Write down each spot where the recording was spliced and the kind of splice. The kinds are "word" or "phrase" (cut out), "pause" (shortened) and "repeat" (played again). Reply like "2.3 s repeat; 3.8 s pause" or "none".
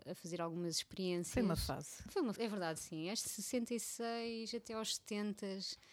2.4 s word; 3.2 s word

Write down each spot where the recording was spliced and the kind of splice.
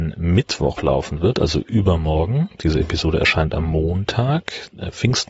none

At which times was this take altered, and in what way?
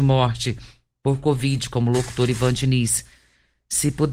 none

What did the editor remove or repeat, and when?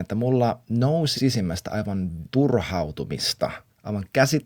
1.2 s word; 2.3 s word

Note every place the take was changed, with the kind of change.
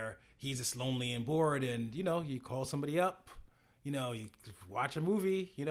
none

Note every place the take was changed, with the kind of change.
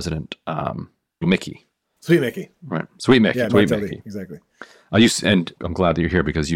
1.2 s word; 3.5 s word; 5.6 s word

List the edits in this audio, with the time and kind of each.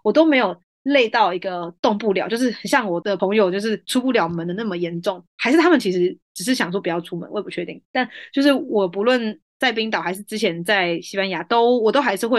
5.3 s pause; 6.2 s pause

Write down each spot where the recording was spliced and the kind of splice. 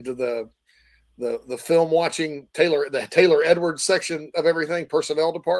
none

